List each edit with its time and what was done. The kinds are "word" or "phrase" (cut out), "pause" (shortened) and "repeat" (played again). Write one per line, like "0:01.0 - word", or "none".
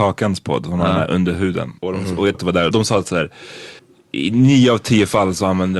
0:01.8 - pause
0:02.3 - word
0:02.7 - word
0:03.8 - pause

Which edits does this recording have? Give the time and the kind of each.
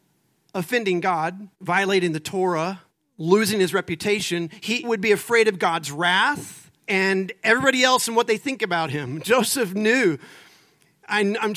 0:01.5 - pause
0:02.9 - pause
0:04.8 - word
0:06.8 - pause

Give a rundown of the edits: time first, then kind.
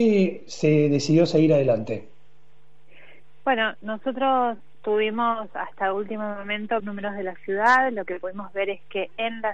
0:06.8 - phrase

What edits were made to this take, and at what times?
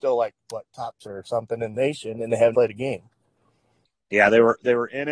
0:01.0 - word
0:01.7 - word
0:02.5 - word

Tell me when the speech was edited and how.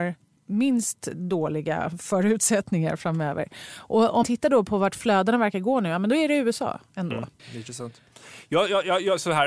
0:04.2 - word
0:07.4 - pause

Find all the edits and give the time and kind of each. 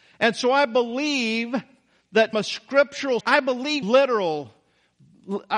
0:02.3 - word
0:03.2 - word
0:03.8 - word

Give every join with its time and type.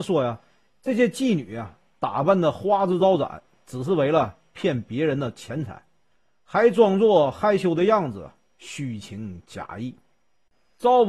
none

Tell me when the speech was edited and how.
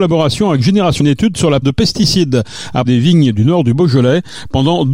0:01.0 - word
0:01.6 - word
0:02.8 - word

